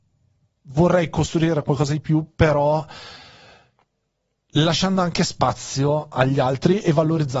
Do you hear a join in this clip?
no; 0 cuts

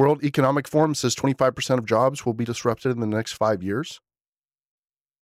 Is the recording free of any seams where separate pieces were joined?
yes; 0 cuts

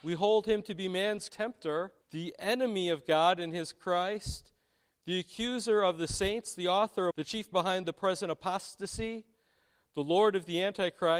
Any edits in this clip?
yes; 4 cuts; at 1.3 s, 2.0 s, 7.1 s, 7.5 s

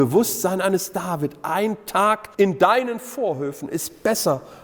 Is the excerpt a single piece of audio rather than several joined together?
no; 1 cut; at 2.3 s

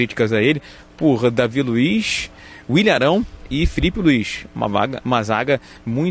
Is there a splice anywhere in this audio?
no; 0 cuts

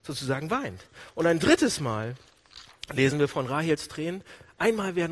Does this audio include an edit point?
no; 0 cuts

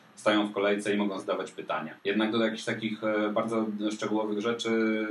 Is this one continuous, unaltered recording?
no; 1 cut; at 2.0 s

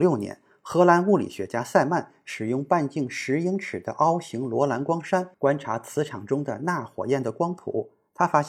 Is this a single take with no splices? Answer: no; 1 cut; at 5.3 s

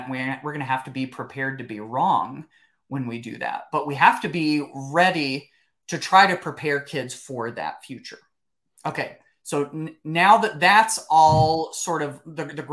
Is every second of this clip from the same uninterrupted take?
yes; 0 cuts

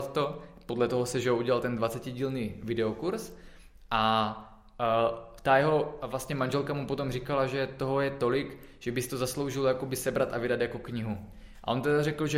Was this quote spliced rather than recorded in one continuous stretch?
no; 0 cuts

